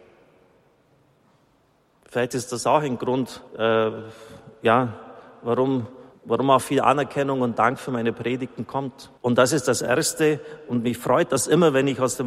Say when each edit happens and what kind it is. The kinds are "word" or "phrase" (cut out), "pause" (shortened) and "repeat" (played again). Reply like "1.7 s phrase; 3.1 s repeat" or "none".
3.5 s pause; 6.1 s pause; 9.2 s pause